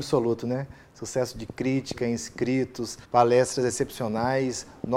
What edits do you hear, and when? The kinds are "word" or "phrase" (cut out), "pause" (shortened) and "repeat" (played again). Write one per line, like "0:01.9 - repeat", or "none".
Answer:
0:03.0 - pause